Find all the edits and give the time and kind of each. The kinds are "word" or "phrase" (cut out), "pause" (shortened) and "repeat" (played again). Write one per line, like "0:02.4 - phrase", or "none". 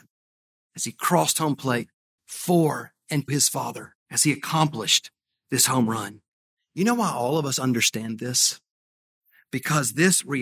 0:02.2 - word
0:03.3 - word
0:04.0 - pause